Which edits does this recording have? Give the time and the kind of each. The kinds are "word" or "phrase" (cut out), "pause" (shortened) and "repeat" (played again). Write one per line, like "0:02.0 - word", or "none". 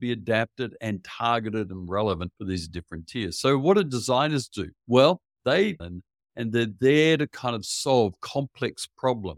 0:02.4 - pause
0:04.8 - pause
0:05.8 - phrase